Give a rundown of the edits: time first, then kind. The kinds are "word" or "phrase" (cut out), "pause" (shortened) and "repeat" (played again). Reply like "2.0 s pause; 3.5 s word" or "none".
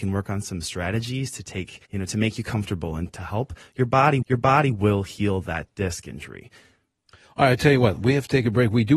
1.8 s pause; 3.1 s word; 4.2 s repeat